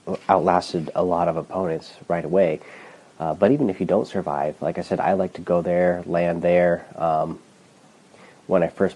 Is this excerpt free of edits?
yes; 0 cuts

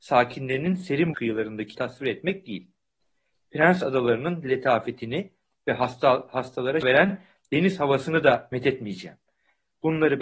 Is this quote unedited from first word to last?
no; 3 cuts; at 1.1 s, 1.7 s, 6.8 s

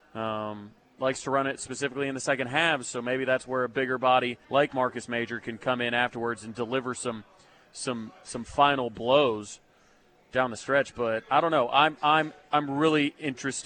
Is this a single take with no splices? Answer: no; 1 cut; at 4.4 s

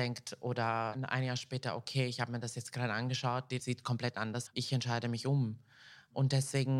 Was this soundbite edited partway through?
yes; 2 cuts; at 3.6 s, 4.5 s

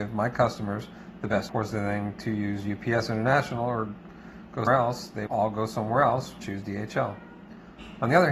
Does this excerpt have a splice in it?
yes; 4 cuts; at 1.5 s, 4.7 s, 5.3 s, 6.4 s

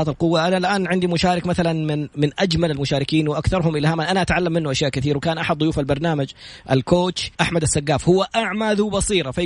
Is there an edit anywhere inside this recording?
yes; 1 cut; at 7.3 s

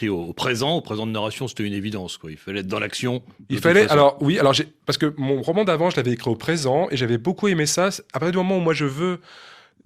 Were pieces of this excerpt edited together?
no; 0 cuts

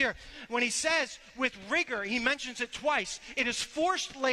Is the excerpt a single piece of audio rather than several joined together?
yes; 0 cuts

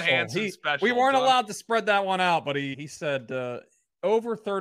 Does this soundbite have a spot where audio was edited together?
yes; 1 cut; at 2.7 s

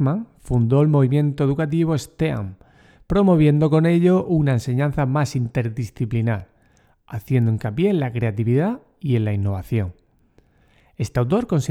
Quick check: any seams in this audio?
no; 0 cuts

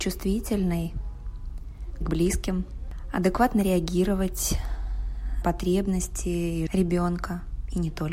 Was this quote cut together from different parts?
yes; 3 cuts; at 2.0 s, 5.4 s, 6.7 s

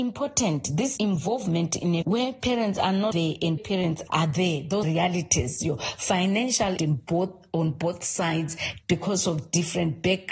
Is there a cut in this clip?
yes; 8 cuts; at 1.0 s, 2.0 s, 3.1 s, 3.6 s, 4.1 s, 4.8 s, 6.8 s, 8.8 s

